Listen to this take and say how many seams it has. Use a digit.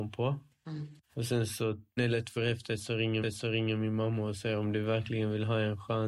4